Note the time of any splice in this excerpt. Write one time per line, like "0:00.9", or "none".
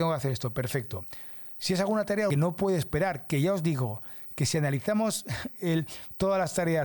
0:02.3